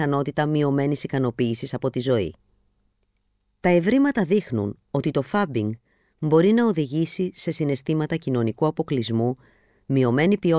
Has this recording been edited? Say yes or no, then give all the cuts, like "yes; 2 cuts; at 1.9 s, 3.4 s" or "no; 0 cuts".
no; 0 cuts